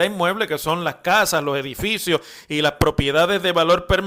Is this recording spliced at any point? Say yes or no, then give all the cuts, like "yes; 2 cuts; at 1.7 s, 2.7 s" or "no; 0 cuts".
no; 0 cuts